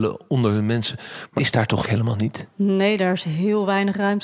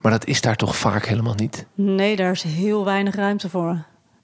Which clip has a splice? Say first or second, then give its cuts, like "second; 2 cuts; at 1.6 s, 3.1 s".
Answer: first; 2 cuts; at 1.4 s, 1.8 s